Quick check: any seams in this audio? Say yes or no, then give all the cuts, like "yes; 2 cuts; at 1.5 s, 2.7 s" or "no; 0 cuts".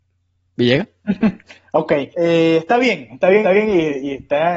yes; 2 cuts; at 2.1 s, 3.4 s